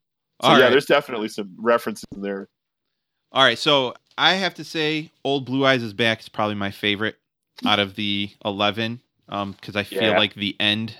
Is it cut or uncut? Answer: uncut